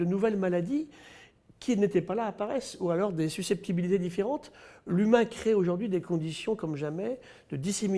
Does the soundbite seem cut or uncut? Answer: uncut